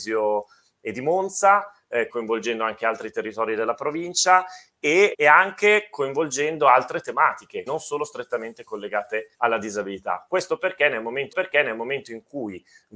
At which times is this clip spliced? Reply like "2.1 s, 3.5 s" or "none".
2.1 s, 5.1 s, 7.7 s, 9.3 s, 11.3 s